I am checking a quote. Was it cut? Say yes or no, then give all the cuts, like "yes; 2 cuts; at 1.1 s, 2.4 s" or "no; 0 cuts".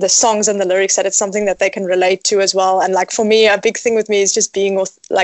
no; 0 cuts